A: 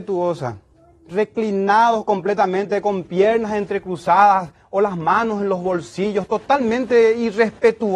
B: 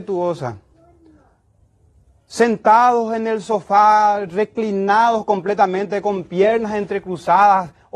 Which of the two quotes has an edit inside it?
A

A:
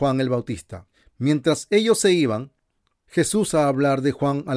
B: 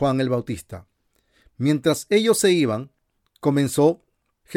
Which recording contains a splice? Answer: A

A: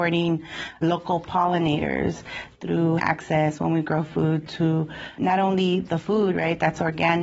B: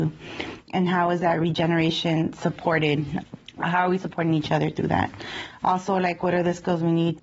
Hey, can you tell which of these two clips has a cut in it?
A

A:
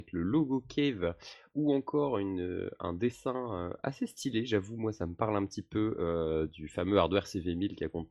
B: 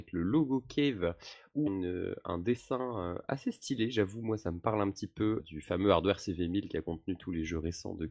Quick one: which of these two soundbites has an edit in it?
B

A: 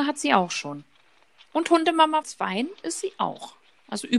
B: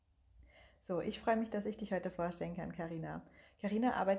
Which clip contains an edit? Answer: A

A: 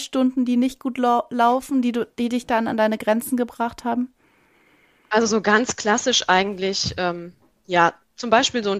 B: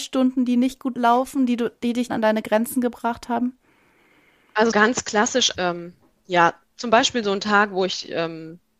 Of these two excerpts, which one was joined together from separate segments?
B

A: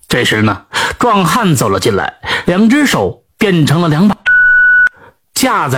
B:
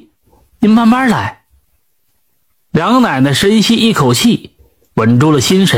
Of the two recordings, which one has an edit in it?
A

